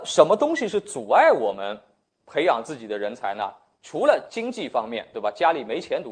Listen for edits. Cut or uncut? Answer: uncut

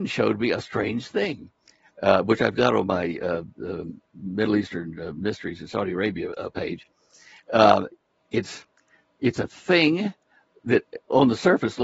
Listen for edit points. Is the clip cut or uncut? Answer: uncut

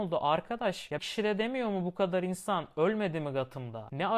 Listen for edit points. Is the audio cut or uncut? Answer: cut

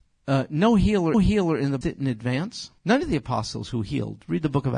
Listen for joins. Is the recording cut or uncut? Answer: cut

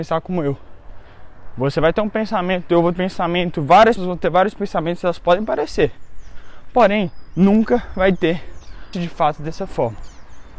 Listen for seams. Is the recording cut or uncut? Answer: cut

